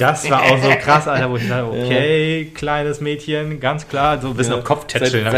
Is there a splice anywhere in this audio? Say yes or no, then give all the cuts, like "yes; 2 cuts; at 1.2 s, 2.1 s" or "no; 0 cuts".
no; 0 cuts